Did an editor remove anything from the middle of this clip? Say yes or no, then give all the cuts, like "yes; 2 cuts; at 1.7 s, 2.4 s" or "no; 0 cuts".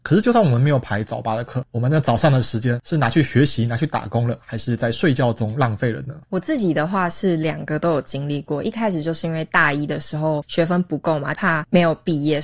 yes; 1 cut; at 11.3 s